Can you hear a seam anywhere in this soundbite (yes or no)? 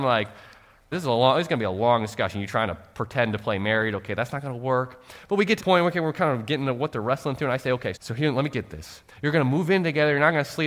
yes